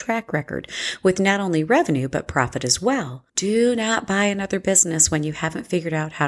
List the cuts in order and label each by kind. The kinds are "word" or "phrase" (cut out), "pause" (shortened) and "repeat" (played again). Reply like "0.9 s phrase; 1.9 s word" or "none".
3.3 s pause